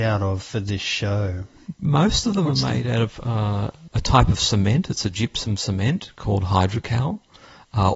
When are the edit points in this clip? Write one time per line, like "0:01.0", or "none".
0:01.7
0:03.9

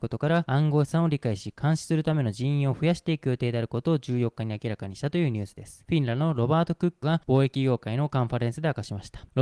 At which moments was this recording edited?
0:07.0

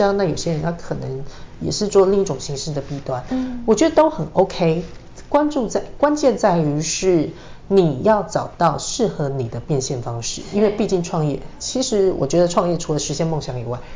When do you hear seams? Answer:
none

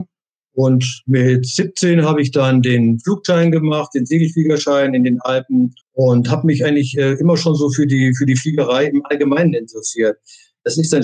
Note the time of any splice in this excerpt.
0:05.8

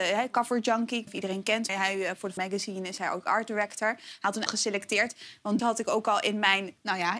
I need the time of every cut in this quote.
0:01.1
0:01.7
0:02.4
0:04.5
0:05.6

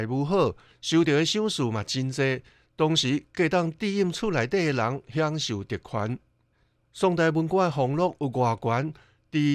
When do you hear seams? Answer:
none

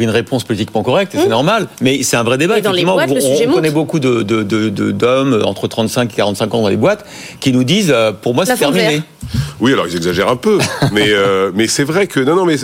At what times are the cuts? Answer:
none

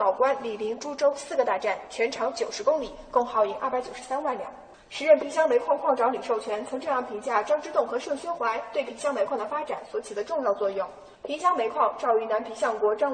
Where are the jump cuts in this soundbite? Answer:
0:04.7
0:11.2

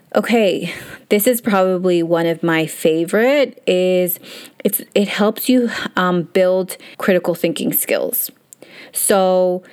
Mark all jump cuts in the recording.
0:06.9

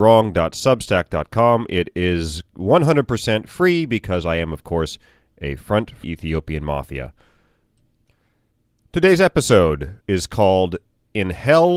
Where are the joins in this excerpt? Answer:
0:06.0
0:10.0

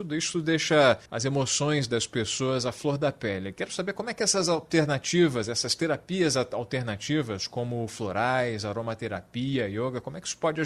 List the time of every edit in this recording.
0:01.1

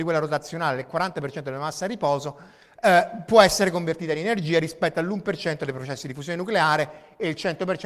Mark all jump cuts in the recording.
none

